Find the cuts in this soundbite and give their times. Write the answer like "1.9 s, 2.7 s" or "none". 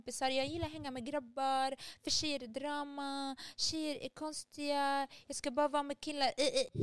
none